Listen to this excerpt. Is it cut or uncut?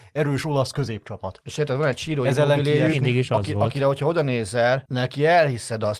uncut